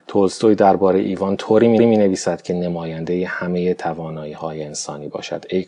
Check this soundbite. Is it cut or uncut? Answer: cut